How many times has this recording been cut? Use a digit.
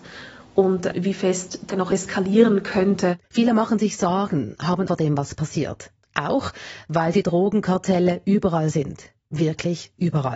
3